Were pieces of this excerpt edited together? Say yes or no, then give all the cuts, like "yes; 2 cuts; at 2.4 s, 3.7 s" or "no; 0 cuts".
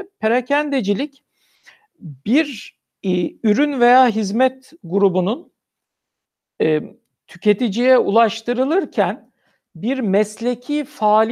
no; 0 cuts